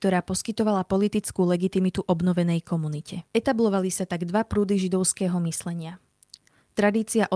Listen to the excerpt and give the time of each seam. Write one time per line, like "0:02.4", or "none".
0:03.3